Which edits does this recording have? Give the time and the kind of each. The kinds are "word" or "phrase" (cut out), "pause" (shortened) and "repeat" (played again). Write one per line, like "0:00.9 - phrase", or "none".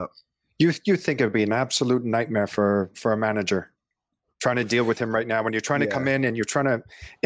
none